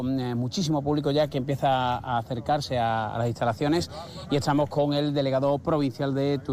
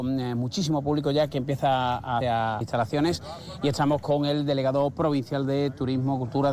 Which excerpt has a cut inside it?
second; 2 cuts; at 2.2 s, 2.6 s

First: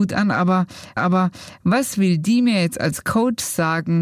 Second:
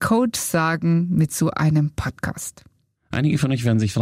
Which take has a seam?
first; 1 cut; at 1.0 s

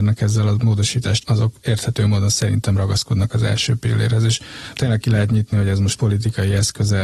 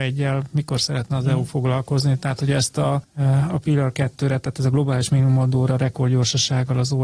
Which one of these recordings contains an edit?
first; 2 cuts; at 1.2 s, 4.7 s

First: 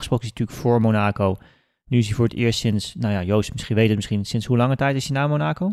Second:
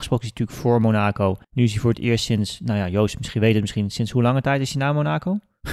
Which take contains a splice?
second; 1 cut; at 1.4 s

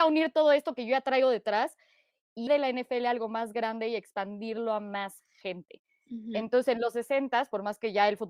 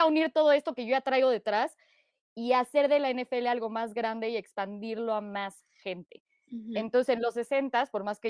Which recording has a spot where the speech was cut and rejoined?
first; 1 cut; at 2.5 s

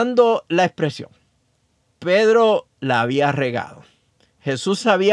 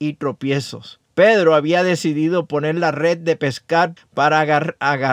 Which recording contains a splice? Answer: second; 2 cuts; at 1.1 s, 4.0 s

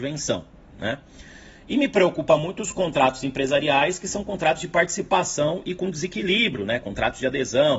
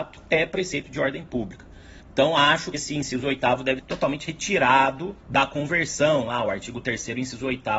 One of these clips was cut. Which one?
second; 4 cuts; at 2.0 s, 2.7 s, 3.8 s, 5.2 s

